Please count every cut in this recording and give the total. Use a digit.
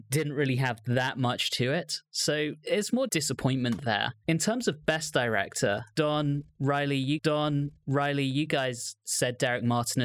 2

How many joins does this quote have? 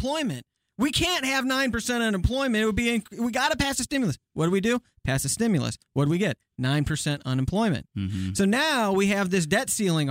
0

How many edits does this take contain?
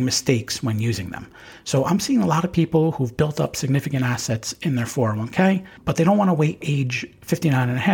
1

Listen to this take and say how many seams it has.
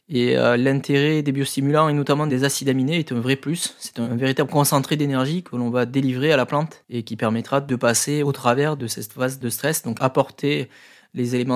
1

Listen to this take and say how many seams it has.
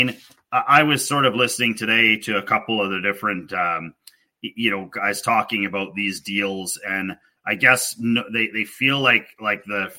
0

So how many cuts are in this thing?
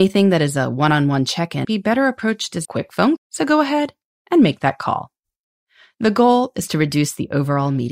3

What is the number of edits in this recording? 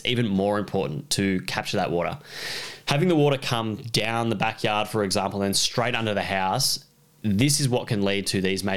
0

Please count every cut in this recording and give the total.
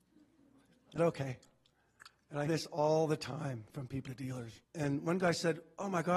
5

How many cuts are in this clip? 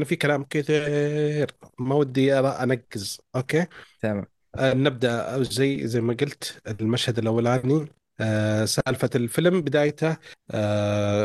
0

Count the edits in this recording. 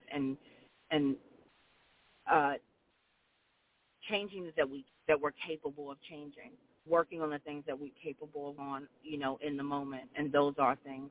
6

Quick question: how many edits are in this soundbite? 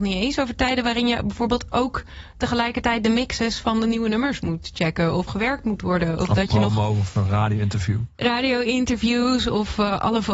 1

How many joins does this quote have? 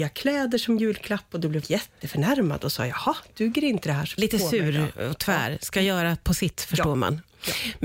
3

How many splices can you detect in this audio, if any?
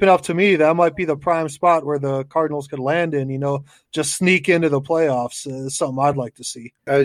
0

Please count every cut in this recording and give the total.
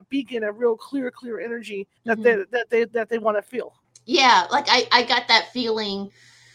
2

